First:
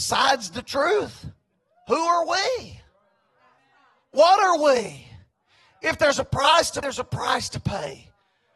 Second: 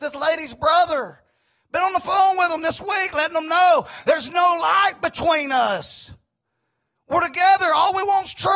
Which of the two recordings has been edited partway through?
first; 1 cut; at 6.8 s

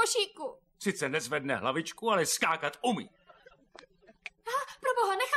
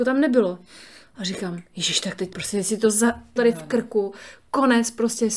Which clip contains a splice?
second; 2 cuts; at 2.3 s, 3.4 s

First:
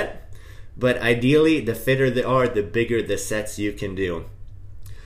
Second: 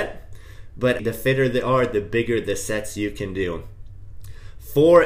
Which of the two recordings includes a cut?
second; 1 cut; at 1.0 s

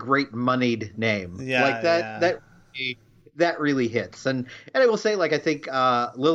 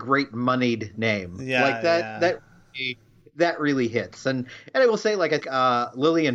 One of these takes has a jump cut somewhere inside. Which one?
second; 1 cut; at 5.4 s

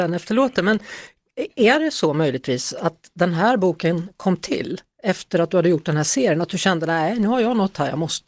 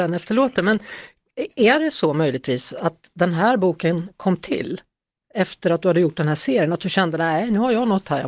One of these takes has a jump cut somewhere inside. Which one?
first; 1 cut; at 4.9 s

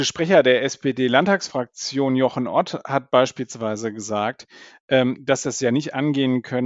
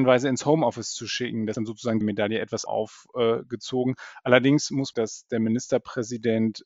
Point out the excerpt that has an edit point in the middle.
second; 4 cuts; at 1.5 s, 2.0 s, 2.7 s, 4.9 s

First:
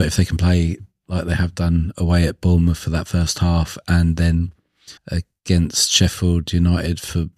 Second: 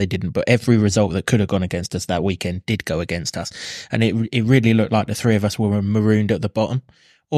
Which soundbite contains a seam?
first; 1 cut; at 5.0 s

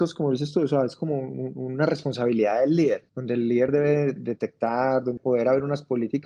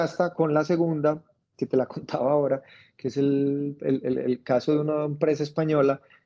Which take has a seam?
first; 3 cuts; at 3.1 s, 4.2 s, 5.2 s

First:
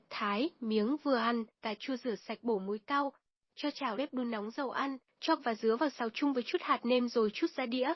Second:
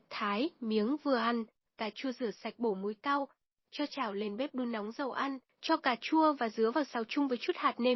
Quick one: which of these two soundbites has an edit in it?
first; 3 cuts; at 1.5 s, 4.0 s, 5.4 s

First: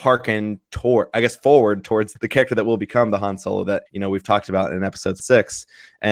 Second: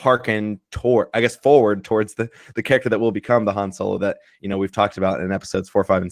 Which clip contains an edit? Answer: first; 3 cuts; at 2.2 s, 3.9 s, 5.2 s

